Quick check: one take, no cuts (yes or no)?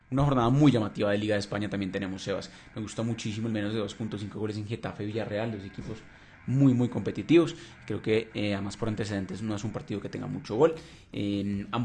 yes